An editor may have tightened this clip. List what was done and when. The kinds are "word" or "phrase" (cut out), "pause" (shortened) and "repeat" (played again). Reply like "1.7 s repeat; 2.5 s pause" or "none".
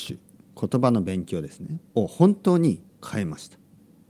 1.9 s pause